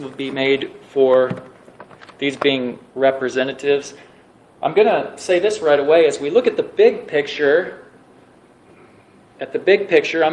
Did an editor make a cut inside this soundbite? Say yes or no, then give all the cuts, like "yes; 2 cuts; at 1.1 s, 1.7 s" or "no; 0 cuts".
no; 0 cuts